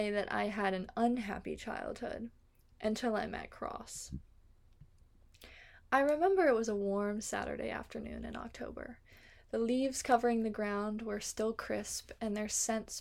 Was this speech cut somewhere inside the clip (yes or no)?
no